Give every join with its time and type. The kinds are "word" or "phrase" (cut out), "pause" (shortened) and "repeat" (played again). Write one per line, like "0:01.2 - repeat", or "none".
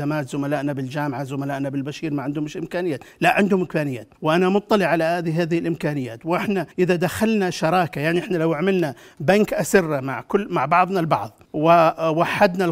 0:04.2 - pause
0:06.7 - pause
0:11.5 - pause